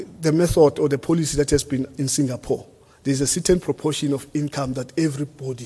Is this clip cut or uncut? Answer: cut